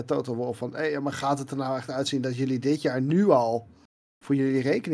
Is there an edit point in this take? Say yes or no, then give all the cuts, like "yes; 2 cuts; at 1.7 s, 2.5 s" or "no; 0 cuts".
no; 0 cuts